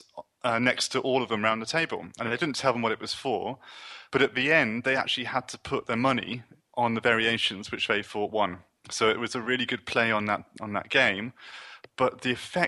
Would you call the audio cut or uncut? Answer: uncut